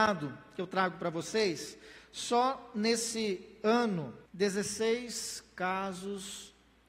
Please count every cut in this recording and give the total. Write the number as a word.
one